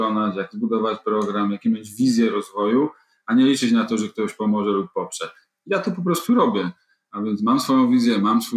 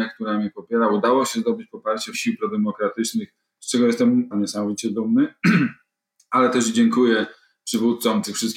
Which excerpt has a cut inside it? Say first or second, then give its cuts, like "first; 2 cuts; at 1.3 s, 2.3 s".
second; 2 cuts; at 2.1 s, 4.3 s